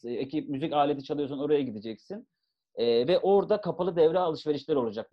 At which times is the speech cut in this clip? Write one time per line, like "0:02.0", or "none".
none